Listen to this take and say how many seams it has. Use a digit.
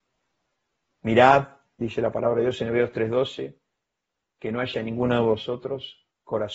0